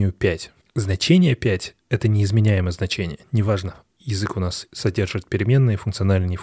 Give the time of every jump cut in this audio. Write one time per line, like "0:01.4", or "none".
none